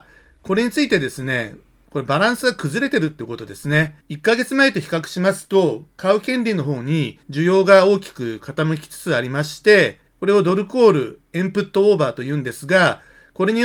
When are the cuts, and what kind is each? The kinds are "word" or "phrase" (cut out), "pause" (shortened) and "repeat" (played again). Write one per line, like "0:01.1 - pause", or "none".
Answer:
0:04.0 - pause
0:07.2 - pause
0:10.1 - pause